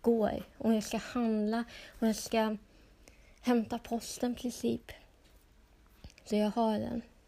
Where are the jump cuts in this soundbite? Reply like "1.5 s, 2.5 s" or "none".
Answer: 6.3 s